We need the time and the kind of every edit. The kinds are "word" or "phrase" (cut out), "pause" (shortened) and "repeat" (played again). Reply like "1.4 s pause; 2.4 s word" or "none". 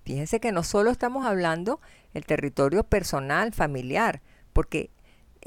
none